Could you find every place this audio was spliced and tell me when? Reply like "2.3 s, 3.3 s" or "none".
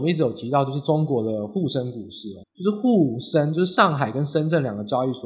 2.4 s